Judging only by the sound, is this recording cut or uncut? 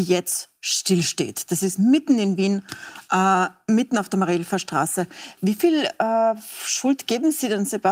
uncut